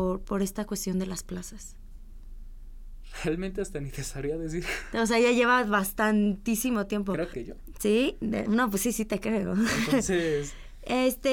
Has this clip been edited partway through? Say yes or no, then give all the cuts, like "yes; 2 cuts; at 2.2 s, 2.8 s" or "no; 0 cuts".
yes; 2 cuts; at 7.3 s, 8.5 s